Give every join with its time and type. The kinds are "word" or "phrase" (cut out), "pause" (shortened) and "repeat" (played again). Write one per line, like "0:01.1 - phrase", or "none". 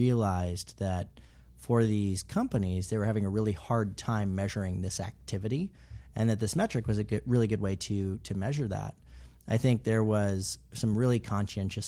none

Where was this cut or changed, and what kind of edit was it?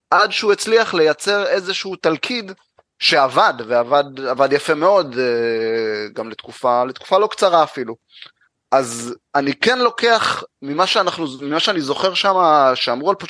none

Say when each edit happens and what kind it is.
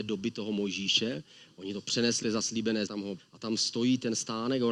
0:02.2 - word
0:02.9 - word
0:03.2 - word

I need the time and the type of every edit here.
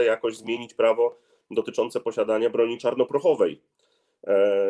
none

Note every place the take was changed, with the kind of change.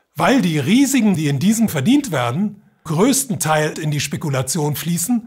0:01.1 - word
0:01.7 - word
0:02.9 - word
0:03.7 - word

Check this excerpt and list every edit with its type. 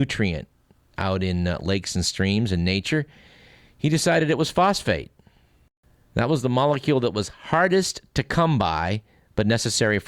none

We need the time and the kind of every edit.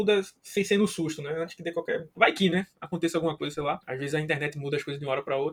0:02.1 - pause
0:03.8 - pause

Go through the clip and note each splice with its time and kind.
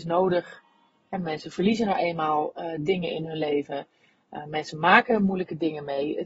none

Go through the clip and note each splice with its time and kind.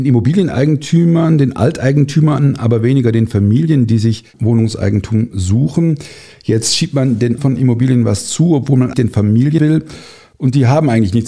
0:07.4 - word
0:08.9 - word
0:09.6 - word

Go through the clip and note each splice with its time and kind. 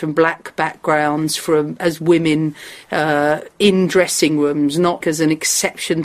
0:02.8 - pause
0:05.0 - word

